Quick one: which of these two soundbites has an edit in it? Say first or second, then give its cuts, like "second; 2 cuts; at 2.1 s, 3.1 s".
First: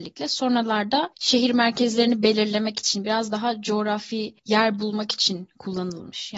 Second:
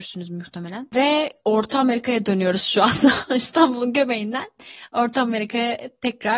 first; 2 cuts; at 1.1 s, 4.4 s